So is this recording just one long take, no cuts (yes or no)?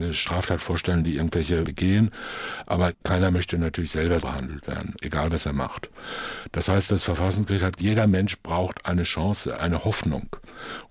no